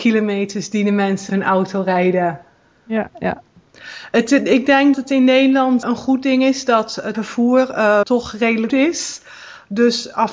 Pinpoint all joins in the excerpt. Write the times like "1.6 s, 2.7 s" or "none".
1.3 s, 3.1 s, 4.9 s, 5.8 s, 7.1 s, 8.0 s, 8.7 s